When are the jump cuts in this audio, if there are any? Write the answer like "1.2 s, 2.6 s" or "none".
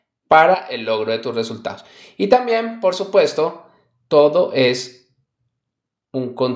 none